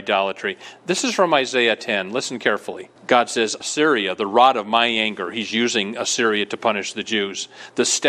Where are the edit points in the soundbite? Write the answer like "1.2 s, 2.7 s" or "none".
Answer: 3.0 s, 3.6 s